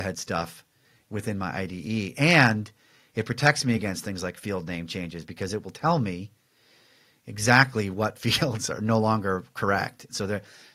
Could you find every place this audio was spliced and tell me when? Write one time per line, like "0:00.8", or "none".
none